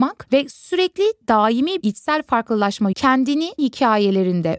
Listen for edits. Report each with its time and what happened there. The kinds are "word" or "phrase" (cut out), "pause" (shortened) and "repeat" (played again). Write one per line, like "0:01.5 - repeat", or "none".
0:01.8 - word
0:02.9 - word
0:03.6 - word